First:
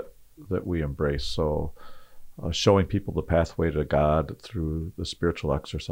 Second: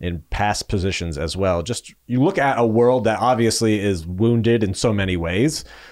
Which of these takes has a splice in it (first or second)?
second